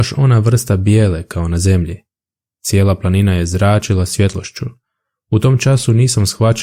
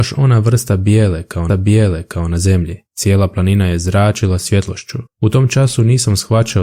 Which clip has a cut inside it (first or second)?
second